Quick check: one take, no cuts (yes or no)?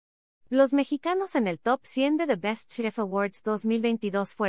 yes